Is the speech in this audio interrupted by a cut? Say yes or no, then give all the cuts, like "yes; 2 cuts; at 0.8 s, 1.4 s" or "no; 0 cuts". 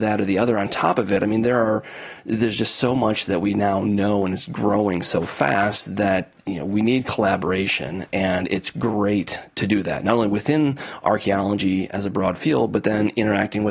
no; 0 cuts